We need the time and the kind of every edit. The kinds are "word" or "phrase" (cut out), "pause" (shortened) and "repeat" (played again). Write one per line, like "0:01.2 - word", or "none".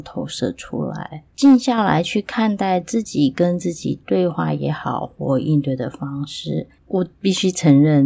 0:01.3 - pause
0:06.8 - pause